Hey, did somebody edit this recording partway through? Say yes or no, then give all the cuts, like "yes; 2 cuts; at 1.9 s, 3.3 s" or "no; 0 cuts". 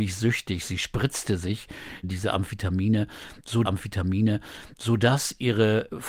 yes; 2 cuts; at 2.0 s, 3.6 s